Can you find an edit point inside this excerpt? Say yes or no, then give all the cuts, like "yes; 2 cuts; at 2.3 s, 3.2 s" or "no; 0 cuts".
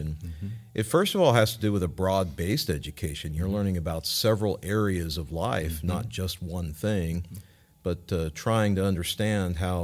no; 0 cuts